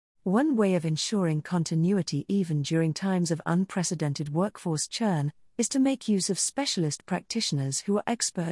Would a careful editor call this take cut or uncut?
uncut